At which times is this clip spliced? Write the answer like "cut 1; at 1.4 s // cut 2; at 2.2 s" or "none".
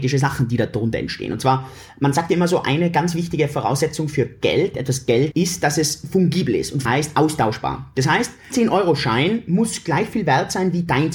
cut 1; at 4.7 s // cut 2; at 5.3 s // cut 3; at 6.8 s // cut 4; at 8.5 s